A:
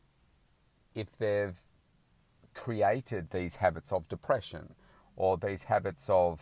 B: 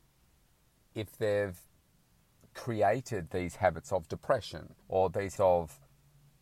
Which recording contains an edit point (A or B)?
B